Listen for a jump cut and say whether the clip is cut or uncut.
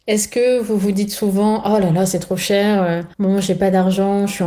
cut